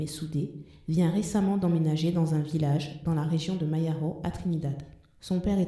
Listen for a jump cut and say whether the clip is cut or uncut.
uncut